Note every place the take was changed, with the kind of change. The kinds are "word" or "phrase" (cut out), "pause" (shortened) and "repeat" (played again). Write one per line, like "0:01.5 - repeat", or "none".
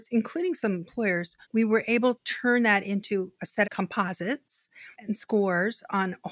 0:01.4 - pause
0:02.1 - word
0:03.6 - word
0:04.9 - pause